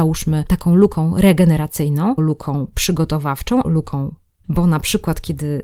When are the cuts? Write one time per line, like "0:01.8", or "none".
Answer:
0:02.2
0:03.6
0:04.4